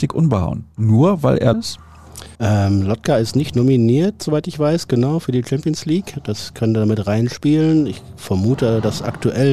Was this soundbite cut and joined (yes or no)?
yes